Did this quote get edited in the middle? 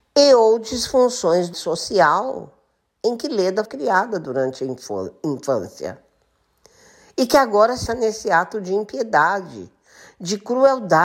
yes; 3 cuts; at 1.5 s, 3.7 s, 7.9 s

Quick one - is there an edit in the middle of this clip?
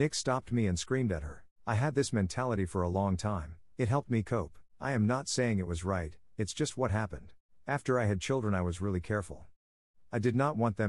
yes; 3 cuts; at 1.5 s, 4.7 s, 7.4 s

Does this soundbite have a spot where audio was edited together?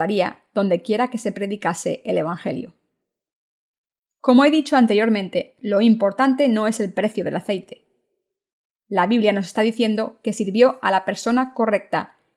no; 0 cuts

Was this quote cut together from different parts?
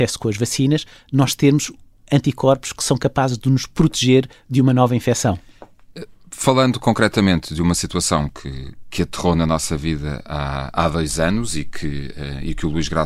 no; 0 cuts

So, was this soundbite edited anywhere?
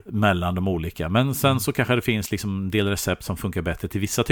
no; 0 cuts

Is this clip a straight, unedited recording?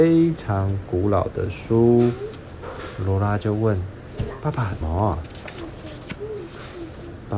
no; 1 cut; at 4.8 s

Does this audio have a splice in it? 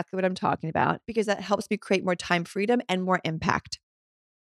yes; 1 cut; at 1.0 s

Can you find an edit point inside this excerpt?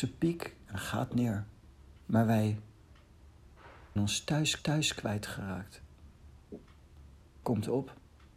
yes; 4 cuts; at 2.0 s, 4.0 s, 4.6 s, 7.4 s

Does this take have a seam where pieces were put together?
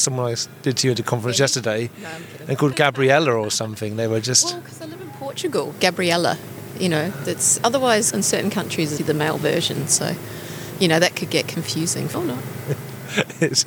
yes; 6 cuts; at 2.7 s, 5.7 s, 7.2 s, 8.1 s, 9.0 s, 12.1 s

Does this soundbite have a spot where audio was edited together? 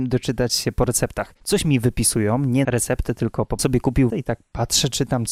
yes; 4 cuts; at 1.4 s, 2.6 s, 3.6 s, 4.1 s

